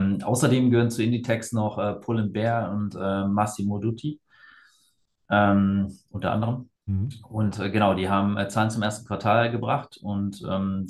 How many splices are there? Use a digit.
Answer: 1